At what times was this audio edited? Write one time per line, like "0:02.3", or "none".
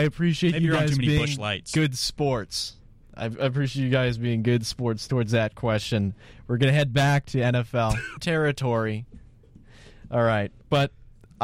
0:08.2